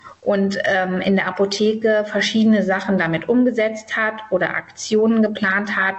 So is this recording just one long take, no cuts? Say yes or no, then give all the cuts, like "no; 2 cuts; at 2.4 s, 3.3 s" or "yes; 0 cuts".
yes; 0 cuts